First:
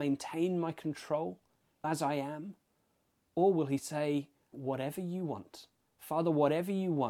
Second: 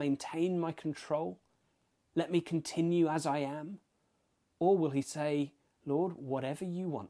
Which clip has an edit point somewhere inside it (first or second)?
first